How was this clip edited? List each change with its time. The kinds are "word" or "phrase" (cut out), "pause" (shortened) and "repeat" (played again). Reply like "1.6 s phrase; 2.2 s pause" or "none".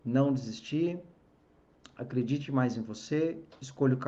none